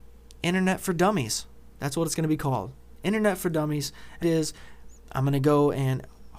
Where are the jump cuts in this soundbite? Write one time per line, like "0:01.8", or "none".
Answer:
0:04.2